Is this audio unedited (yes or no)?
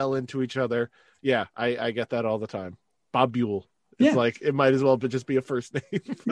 yes